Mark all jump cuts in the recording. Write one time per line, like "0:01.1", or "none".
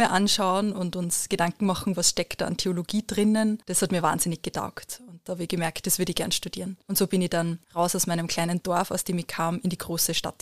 0:03.6
0:06.8
0:07.6